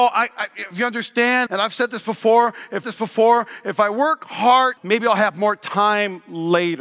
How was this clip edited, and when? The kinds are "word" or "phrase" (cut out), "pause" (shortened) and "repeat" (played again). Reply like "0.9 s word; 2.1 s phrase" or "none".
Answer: 1.5 s word; 2.8 s repeat; 4.8 s word